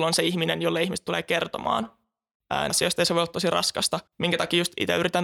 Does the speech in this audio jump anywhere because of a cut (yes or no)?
yes